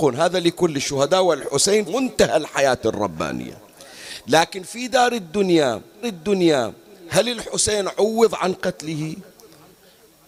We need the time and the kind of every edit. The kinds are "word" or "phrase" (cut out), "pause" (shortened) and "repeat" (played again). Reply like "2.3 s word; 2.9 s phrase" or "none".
1.9 s word; 6.0 s repeat